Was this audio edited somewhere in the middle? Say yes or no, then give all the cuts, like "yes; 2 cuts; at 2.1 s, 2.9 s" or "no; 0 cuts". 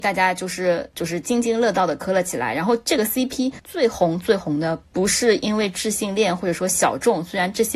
no; 0 cuts